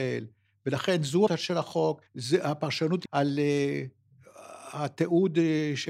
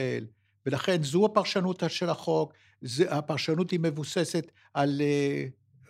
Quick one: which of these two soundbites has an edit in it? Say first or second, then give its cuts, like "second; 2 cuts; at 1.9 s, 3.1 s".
first; 3 cuts; at 1.3 s, 2.1 s, 3.0 s